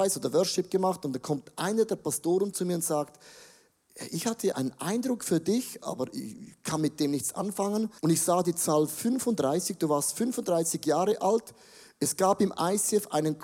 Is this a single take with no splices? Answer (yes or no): no